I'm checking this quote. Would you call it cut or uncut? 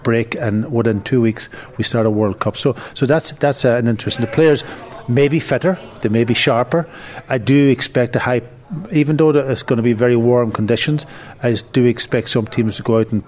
uncut